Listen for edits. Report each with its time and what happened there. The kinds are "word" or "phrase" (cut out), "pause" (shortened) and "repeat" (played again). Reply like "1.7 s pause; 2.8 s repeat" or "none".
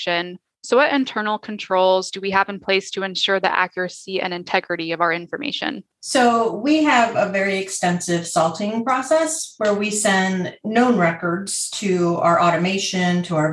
5.9 s pause

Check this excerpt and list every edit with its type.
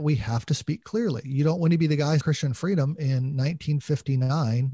2.2 s word

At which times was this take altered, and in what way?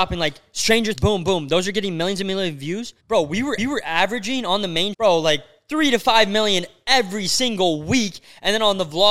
0.9 s word; 3.0 s pause; 3.6 s repeat; 4.9 s word

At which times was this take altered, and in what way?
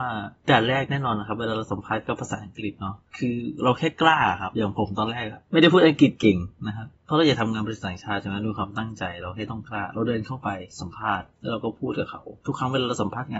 3.1 s pause; 7.0 s pause; 12.4 s pause

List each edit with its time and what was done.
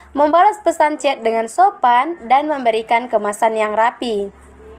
none

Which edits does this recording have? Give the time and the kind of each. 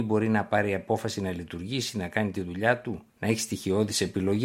3.1 s pause

